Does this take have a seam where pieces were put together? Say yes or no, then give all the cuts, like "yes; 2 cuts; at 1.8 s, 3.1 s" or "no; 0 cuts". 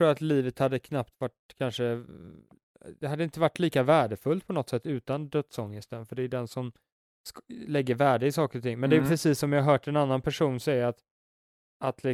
no; 0 cuts